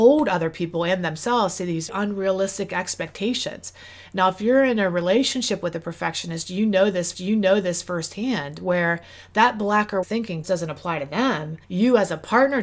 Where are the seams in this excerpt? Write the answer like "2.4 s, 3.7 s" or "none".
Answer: 1.9 s, 7.1 s, 10.0 s, 10.4 s, 11.6 s